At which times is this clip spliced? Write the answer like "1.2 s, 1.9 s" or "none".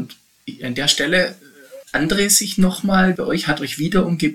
1.8 s, 3.2 s